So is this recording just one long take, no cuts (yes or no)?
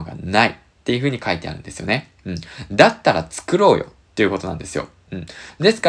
no